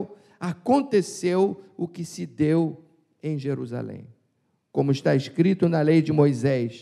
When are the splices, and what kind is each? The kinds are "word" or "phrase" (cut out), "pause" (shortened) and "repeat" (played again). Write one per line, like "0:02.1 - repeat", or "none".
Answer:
none